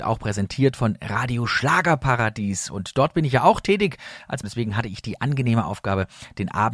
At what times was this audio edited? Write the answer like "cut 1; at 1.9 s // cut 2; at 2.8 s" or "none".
cut 1; at 4.4 s